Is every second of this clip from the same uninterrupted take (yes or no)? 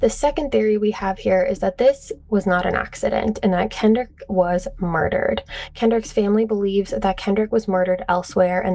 yes